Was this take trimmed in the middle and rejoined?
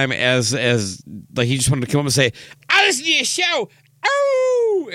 no; 0 cuts

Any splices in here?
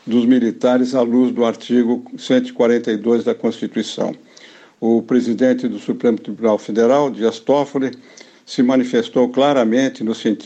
no; 0 cuts

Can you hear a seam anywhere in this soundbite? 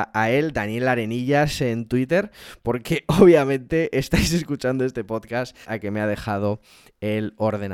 yes; 1 cut; at 5.6 s

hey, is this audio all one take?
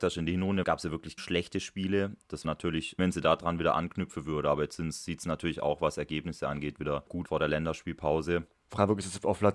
no; 4 cuts; at 1.2 s, 2.4 s, 3.0 s, 7.3 s

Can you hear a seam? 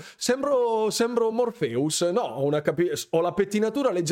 no; 0 cuts

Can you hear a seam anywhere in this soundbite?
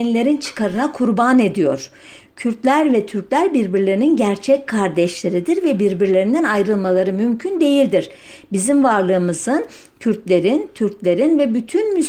no; 0 cuts

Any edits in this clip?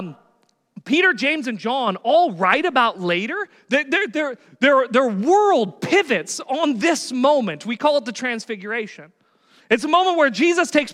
no; 0 cuts

